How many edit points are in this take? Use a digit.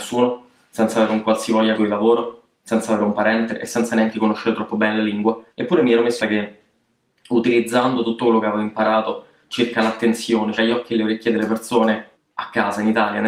5